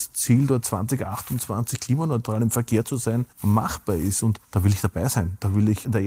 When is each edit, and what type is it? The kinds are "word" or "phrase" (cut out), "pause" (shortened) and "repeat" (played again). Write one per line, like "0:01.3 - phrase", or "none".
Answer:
0:03.3 - pause
0:04.4 - pause